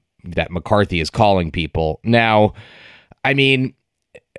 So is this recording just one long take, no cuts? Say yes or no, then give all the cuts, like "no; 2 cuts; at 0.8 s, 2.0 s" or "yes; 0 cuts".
yes; 0 cuts